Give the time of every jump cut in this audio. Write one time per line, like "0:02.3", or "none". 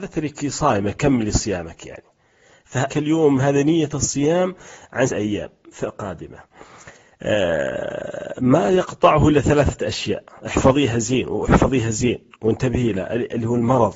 0:02.9
0:05.1